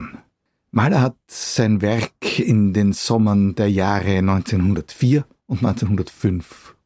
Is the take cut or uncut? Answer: uncut